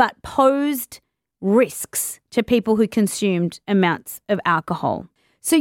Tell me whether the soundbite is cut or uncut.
uncut